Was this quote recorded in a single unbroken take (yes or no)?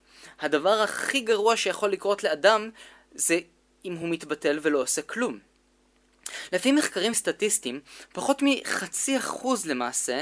yes